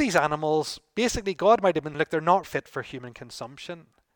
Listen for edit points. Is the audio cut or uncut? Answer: cut